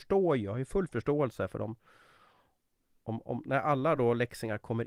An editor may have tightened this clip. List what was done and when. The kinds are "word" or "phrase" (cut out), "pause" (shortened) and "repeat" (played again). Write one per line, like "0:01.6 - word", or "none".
none